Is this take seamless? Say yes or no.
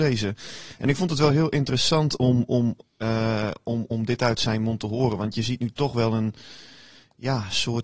yes